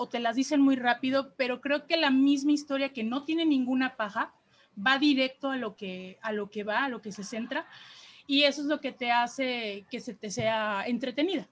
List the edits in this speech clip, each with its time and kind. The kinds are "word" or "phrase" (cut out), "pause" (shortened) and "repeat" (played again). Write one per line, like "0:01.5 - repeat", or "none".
none